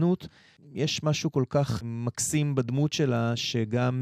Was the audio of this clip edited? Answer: no; 0 cuts

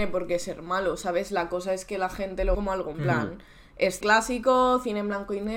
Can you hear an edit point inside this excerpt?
yes; 3 cuts; at 2.5 s, 2.9 s, 4.0 s

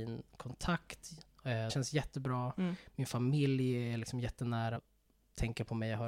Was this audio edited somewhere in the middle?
yes; 2 cuts; at 1.7 s, 4.8 s

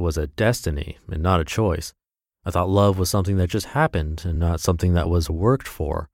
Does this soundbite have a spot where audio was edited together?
no; 0 cuts

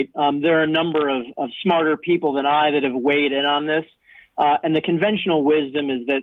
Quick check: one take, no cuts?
yes; 0 cuts

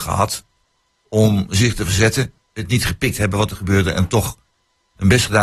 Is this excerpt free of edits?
no; 1 cut; at 2.4 s

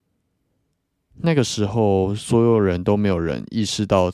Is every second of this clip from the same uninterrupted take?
yes; 0 cuts

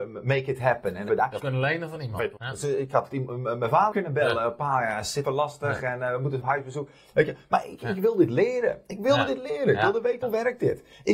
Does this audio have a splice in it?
yes; 8 cuts; at 1.1 s, 1.4 s, 2.4 s, 3.1 s, 3.9 s, 5.2 s, 6.4 s, 10.2 s

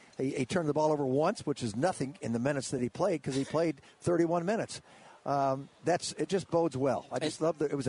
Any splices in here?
no; 0 cuts

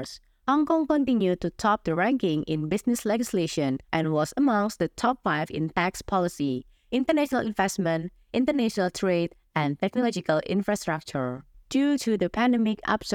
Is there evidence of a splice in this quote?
yes; 1 cut; at 3.8 s

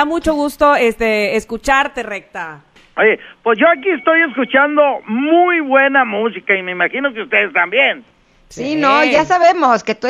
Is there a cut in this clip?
no; 0 cuts

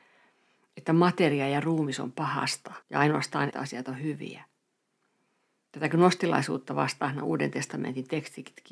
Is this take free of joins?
no; 2 cuts; at 2.8 s, 3.5 s

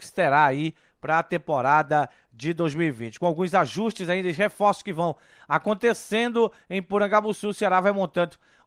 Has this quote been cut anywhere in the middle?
no; 0 cuts

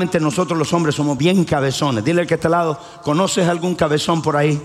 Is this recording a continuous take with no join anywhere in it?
yes; 0 cuts

